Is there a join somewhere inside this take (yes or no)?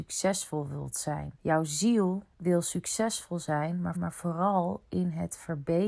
yes